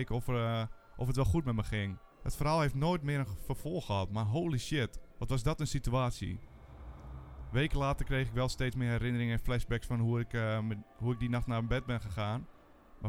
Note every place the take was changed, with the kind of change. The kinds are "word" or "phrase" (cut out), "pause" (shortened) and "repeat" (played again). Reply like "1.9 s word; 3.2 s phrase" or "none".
2.1 s pause; 5.1 s pause